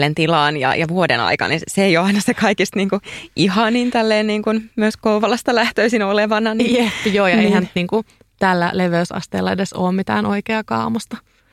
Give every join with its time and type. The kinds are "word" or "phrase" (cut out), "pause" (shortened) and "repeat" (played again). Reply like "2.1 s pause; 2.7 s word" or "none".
none